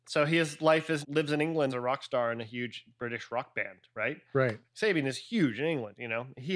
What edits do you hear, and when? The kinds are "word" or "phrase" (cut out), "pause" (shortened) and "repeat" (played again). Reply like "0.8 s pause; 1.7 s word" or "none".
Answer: 1.0 s word; 1.7 s phrase